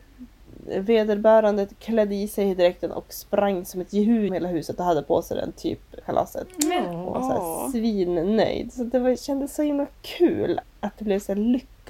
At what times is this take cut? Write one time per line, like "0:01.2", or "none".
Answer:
0:04.3
0:06.0
0:10.6